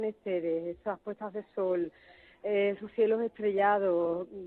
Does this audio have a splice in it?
no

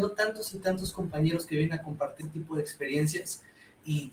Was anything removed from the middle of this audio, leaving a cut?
yes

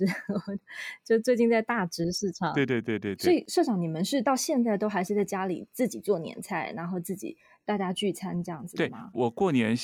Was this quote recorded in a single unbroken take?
yes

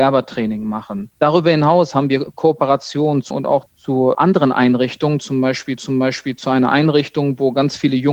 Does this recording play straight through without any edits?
no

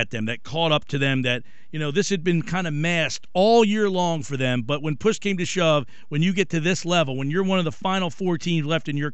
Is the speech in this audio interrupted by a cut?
no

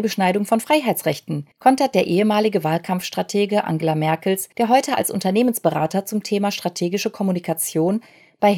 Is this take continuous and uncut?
no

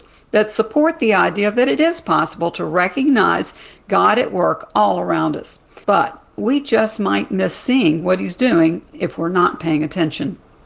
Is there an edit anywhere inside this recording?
yes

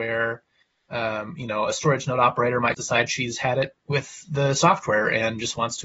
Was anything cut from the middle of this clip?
yes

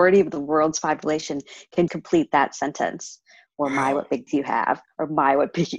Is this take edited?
yes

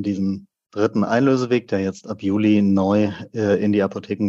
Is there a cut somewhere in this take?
no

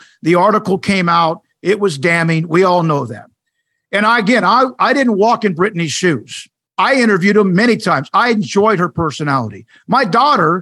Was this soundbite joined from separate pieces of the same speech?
no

